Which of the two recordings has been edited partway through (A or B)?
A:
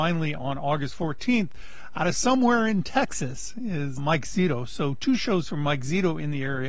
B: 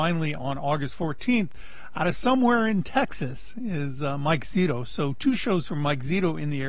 A